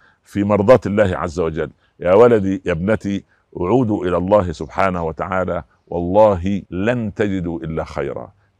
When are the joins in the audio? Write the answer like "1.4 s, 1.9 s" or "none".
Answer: 6.7 s